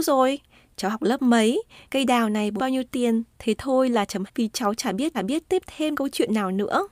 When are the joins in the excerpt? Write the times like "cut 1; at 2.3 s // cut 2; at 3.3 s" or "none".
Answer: cut 1; at 1.9 s // cut 2; at 2.6 s // cut 3; at 3.3 s // cut 4; at 4.3 s // cut 5; at 5.1 s // cut 6; at 5.9 s